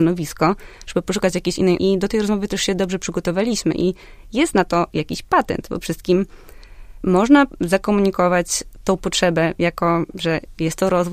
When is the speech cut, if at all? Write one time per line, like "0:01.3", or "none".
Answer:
0:01.8
0:05.8